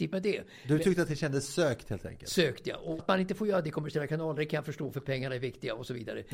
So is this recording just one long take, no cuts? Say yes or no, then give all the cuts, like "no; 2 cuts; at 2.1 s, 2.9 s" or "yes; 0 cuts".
no; 1 cut; at 3.0 s